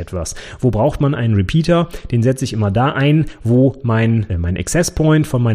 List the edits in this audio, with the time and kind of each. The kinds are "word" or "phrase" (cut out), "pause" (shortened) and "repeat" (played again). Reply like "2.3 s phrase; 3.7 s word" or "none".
4.3 s word